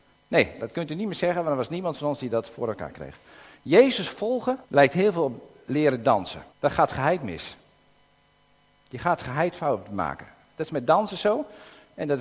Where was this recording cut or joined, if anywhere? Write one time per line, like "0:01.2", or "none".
0:04.6
0:06.5